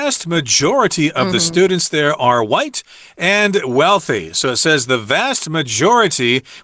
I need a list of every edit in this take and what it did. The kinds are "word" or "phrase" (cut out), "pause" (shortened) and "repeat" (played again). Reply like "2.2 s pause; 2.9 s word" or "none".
none